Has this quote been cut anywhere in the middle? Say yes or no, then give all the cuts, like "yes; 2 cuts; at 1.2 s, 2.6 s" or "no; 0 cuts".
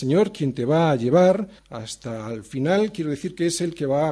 yes; 1 cut; at 1.6 s